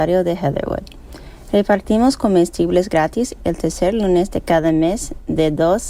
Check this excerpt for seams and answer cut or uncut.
uncut